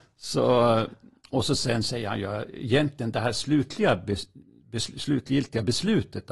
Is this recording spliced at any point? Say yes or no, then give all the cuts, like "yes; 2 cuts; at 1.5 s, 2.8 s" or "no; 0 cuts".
no; 0 cuts